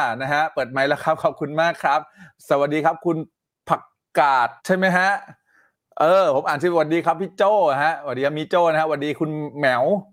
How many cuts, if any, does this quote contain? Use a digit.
1